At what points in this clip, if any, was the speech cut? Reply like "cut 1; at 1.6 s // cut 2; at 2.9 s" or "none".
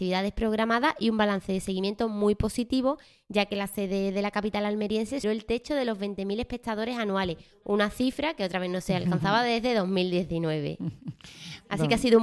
cut 1; at 5.2 s